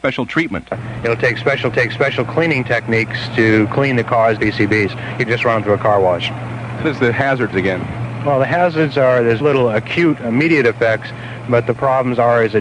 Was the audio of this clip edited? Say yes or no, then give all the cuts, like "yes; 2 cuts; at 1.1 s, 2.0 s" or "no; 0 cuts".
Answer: yes; 6 cuts; at 1.7 s, 4.4 s, 5.3 s, 6.8 s, 7.5 s, 9.4 s